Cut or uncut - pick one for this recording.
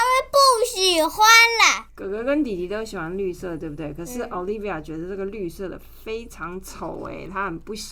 uncut